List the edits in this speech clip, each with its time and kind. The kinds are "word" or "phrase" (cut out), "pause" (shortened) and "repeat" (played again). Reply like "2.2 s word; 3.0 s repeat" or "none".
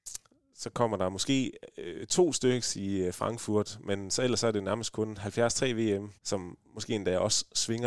6.2 s pause